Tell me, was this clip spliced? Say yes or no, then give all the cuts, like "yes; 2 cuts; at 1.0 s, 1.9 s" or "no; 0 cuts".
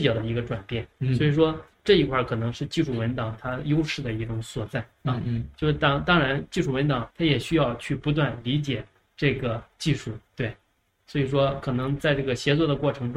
yes; 1 cut; at 7.1 s